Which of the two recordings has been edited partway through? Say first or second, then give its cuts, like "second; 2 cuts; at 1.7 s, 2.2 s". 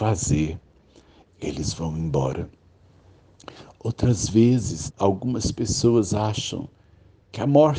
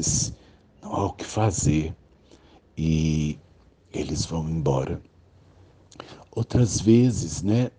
first; 2 cuts; at 1.3 s, 4.9 s